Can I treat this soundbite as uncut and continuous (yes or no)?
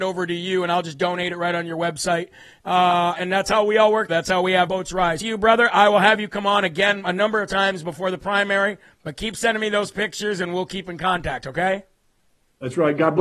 no